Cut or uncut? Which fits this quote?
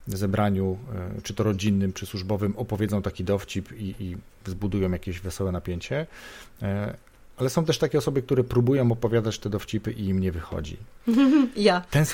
uncut